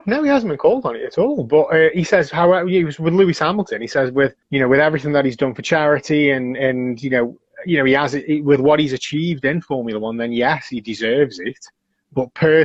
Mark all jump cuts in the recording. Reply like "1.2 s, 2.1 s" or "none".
4.4 s